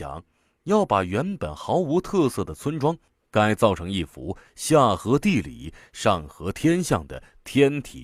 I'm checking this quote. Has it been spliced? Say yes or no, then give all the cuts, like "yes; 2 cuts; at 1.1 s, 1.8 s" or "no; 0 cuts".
yes; 1 cut; at 3.2 s